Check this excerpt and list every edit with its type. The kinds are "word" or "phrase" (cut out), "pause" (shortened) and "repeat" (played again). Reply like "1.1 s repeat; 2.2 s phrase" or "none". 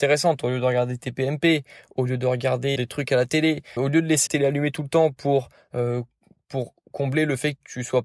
2.8 s word; 3.8 s word; 4.3 s word

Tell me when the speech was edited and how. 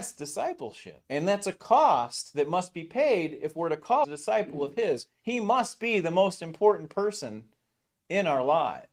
1.0 s pause; 4.0 s word

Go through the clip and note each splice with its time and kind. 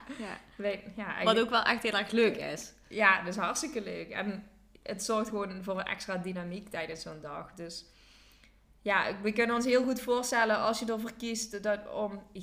none

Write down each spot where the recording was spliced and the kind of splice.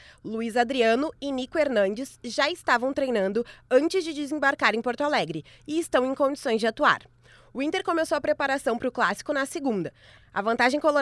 none

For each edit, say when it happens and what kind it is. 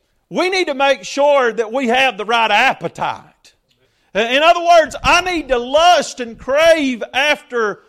3.8 s pause

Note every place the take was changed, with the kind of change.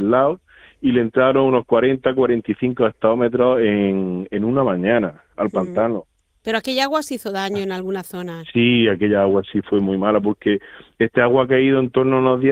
none

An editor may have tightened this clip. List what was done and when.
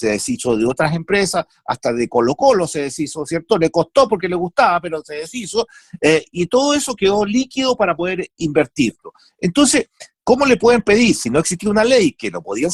none

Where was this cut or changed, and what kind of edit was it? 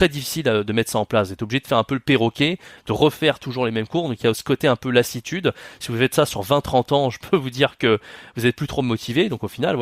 none

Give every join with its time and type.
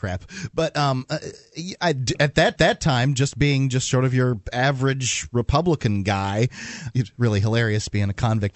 2.6 s repeat; 6.9 s word

